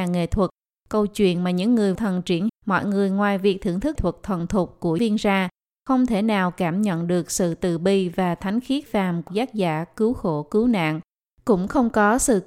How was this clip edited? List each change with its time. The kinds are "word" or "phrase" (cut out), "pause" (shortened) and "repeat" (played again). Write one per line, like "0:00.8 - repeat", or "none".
0:02.0 - word
0:02.5 - word
0:04.0 - word
0:05.0 - word
0:08.9 - word
0:09.3 - word